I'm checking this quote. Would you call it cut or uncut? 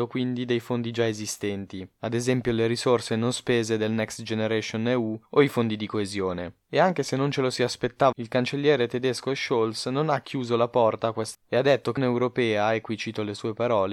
cut